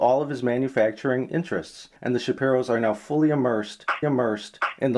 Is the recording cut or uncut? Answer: cut